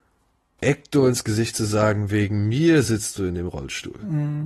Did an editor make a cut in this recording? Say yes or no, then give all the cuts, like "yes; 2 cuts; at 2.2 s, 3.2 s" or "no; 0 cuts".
no; 0 cuts